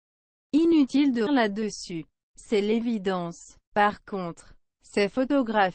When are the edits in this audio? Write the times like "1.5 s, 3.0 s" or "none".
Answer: 1.3 s